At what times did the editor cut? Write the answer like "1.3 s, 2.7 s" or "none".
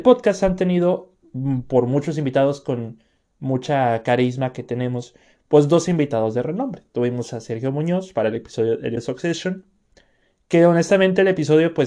9.0 s